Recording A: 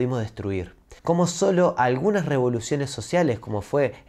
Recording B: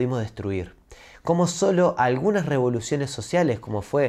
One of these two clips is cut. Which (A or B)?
A